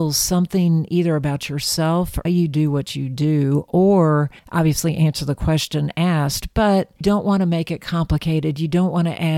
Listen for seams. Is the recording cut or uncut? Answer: cut